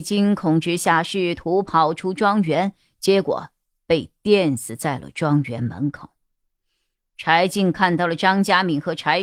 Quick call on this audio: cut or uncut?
uncut